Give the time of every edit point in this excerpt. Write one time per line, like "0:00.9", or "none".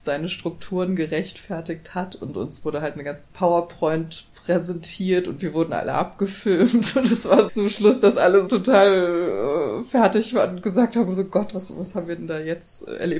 0:03.2
0:07.5
0:08.5
0:11.7